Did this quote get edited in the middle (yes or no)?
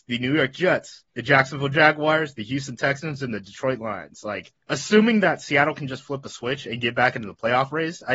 yes